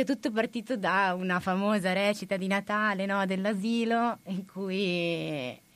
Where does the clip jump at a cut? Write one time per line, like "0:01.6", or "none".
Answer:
none